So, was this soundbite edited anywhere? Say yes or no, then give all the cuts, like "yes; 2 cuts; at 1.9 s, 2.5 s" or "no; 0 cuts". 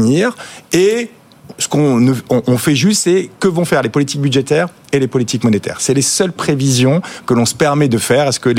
no; 0 cuts